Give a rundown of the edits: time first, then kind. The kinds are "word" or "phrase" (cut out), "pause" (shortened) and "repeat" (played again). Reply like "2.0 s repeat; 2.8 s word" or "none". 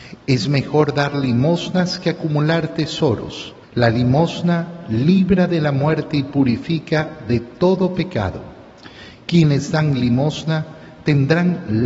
3.6 s pause